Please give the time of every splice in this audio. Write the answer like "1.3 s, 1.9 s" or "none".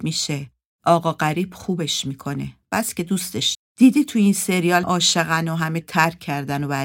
3.5 s, 4.8 s, 5.8 s